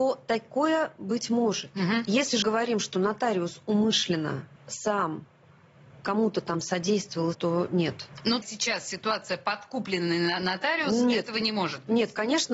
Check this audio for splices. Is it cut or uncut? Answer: cut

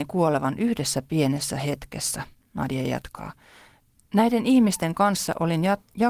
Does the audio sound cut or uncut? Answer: uncut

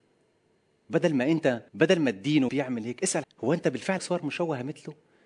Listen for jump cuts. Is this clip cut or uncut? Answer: cut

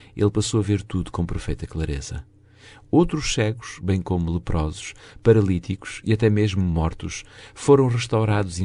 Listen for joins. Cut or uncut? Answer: uncut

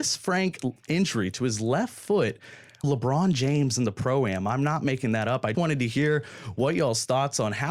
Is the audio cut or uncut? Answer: cut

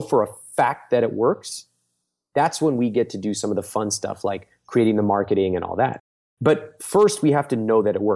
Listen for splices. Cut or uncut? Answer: uncut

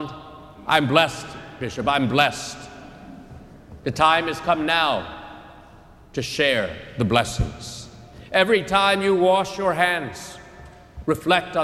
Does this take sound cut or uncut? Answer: uncut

